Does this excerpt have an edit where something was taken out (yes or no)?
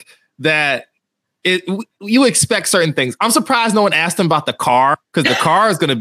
no